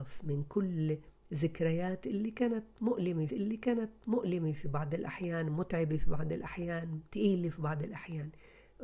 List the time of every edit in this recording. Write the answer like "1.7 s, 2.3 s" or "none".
3.3 s